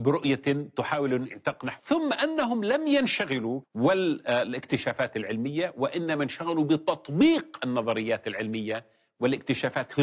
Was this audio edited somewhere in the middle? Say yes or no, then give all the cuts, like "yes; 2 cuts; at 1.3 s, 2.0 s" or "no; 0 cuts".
yes; 2 cuts; at 1.8 s, 3.6 s